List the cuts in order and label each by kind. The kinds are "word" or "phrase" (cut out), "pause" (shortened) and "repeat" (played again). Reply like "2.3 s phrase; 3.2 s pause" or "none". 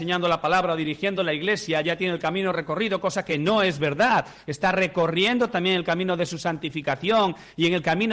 none